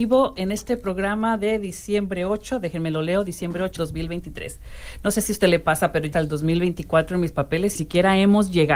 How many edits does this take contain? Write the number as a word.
three